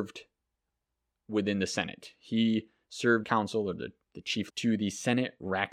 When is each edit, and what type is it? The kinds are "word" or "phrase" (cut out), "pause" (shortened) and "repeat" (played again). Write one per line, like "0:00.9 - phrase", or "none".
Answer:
0:03.2 - phrase
0:04.5 - word